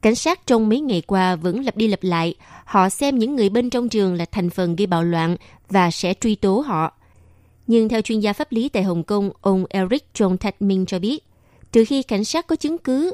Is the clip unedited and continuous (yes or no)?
yes